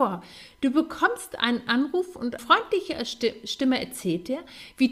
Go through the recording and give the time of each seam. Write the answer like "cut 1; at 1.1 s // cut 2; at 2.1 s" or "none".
cut 1; at 2.4 s